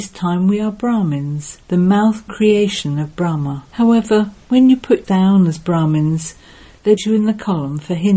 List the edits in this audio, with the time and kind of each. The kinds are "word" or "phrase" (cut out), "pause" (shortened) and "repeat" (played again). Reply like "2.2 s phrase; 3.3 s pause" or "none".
1.6 s pause; 2.3 s word; 3.7 s pause; 5.0 s word; 7.0 s word